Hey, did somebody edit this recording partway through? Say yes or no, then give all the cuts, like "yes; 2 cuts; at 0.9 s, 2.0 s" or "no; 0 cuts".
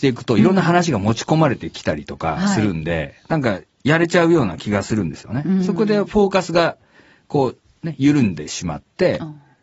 no; 0 cuts